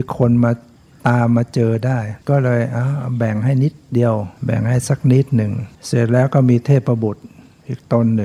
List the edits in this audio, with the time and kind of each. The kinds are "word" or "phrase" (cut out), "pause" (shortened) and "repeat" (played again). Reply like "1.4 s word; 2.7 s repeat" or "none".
2.2 s pause; 4.4 s pause; 5.7 s pause